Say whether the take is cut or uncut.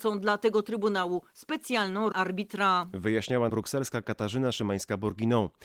cut